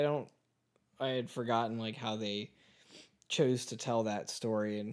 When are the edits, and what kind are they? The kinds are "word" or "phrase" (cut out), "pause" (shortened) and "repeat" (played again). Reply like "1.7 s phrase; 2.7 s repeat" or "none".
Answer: none